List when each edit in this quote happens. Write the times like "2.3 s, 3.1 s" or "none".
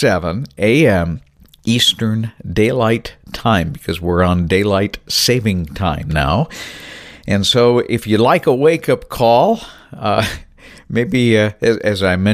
none